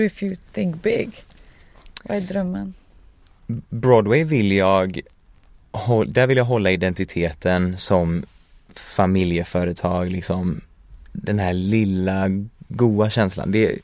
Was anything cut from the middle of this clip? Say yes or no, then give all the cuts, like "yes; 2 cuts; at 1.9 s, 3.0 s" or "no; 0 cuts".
no; 0 cuts